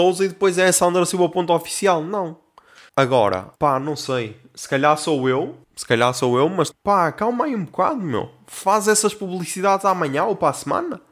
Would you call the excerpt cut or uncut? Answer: cut